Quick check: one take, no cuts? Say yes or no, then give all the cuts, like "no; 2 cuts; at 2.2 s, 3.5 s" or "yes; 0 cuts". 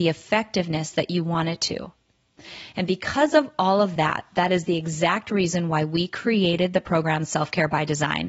yes; 0 cuts